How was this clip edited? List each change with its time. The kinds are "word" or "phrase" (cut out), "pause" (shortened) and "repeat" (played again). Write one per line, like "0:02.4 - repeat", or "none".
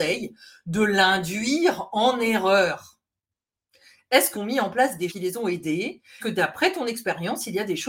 0:04.3 - word
0:05.1 - word
0:06.2 - word